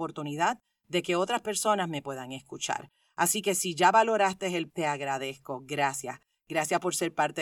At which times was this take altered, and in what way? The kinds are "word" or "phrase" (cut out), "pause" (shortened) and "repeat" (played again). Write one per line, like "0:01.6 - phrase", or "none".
0:04.7 - word